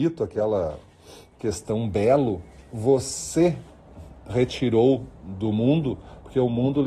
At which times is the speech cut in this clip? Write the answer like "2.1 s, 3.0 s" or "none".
none